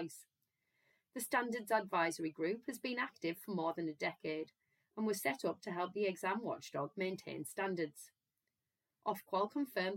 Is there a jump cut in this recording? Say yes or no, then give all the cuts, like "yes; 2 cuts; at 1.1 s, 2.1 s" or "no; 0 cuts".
no; 0 cuts